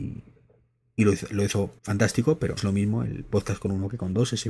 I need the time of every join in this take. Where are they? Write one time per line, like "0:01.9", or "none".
0:01.8
0:02.6